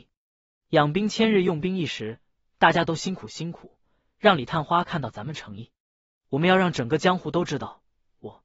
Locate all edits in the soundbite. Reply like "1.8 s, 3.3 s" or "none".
none

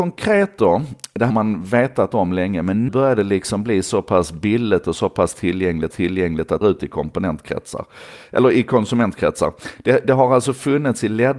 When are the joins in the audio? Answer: 1.3 s, 2.9 s, 5.9 s, 6.6 s

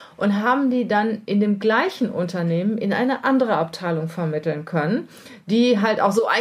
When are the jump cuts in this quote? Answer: none

